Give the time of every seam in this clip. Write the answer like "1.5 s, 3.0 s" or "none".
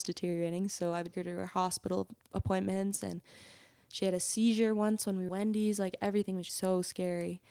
1.1 s, 5.3 s, 6.5 s